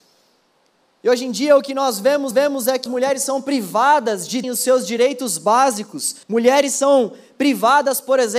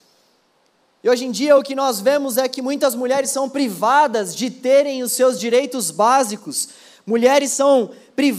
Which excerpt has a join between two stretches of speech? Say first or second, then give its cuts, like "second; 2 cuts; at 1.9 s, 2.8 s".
first; 4 cuts; at 2.3 s, 2.9 s, 4.4 s, 6.2 s